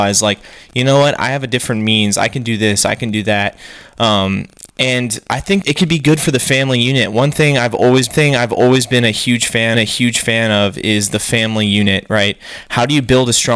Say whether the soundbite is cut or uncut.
cut